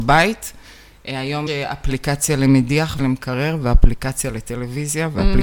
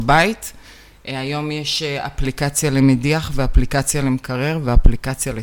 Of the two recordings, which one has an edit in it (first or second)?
first